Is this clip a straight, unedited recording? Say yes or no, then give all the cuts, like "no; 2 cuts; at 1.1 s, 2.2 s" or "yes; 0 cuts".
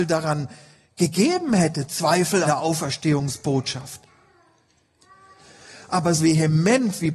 no; 2 cuts; at 2.4 s, 6.2 s